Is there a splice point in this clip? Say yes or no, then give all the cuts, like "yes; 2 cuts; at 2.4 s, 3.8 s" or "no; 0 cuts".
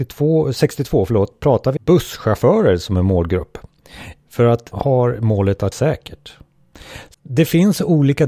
yes; 5 cuts; at 1.3 s, 1.8 s, 4.7 s, 5.7 s, 7.1 s